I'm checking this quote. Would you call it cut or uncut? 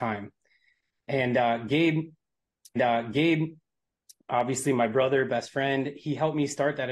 cut